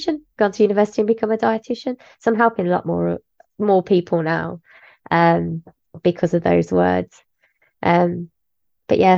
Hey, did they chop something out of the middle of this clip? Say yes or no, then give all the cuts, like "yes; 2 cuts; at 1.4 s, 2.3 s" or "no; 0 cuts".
no; 0 cuts